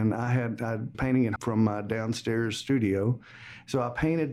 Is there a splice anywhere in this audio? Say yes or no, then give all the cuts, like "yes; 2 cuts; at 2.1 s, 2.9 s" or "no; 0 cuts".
yes; 2 cuts; at 0.9 s, 1.4 s